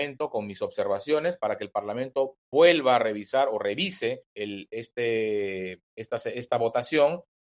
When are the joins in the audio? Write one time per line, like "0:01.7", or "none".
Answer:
0:04.3